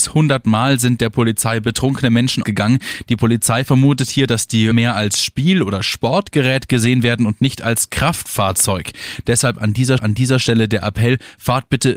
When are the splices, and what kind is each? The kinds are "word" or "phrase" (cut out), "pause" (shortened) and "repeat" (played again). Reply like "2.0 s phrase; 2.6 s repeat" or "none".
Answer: 2.4 s phrase; 4.7 s word; 10.0 s repeat